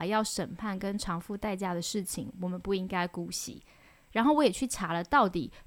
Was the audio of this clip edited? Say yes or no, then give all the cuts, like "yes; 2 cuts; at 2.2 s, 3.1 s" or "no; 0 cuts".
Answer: no; 0 cuts